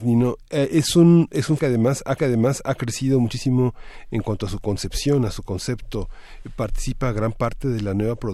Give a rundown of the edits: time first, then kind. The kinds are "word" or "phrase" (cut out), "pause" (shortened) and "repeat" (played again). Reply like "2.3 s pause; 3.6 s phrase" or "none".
1.6 s word; 2.2 s repeat